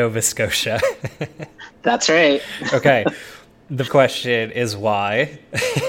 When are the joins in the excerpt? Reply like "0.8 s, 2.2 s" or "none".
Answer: 3.9 s